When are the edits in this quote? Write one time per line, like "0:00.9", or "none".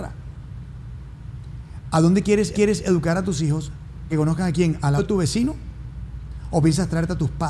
0:02.5
0:04.1
0:05.0